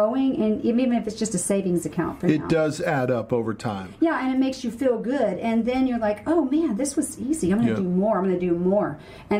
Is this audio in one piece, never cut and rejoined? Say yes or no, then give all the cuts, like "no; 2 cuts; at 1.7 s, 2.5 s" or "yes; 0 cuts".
yes; 0 cuts